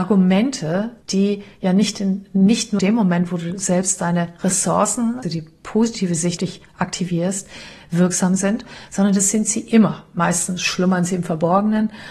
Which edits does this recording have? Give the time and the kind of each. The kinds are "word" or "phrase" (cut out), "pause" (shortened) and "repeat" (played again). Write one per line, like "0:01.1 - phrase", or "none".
0:01.0 - pause
0:02.8 - word
0:05.2 - word
0:06.4 - word